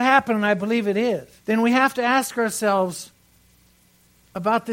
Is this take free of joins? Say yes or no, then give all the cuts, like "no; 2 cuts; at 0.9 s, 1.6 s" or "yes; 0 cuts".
no; 1 cut; at 1.4 s